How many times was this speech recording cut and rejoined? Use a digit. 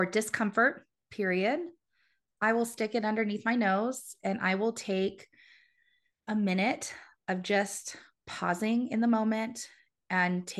0